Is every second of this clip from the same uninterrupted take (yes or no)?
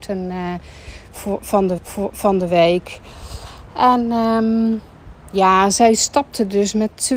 no